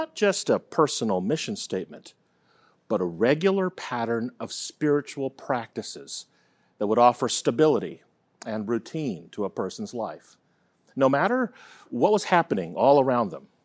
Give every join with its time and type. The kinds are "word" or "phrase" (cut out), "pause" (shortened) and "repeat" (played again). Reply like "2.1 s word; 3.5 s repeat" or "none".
none